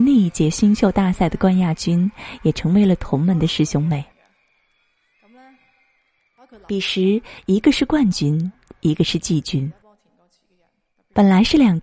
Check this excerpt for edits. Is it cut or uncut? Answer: uncut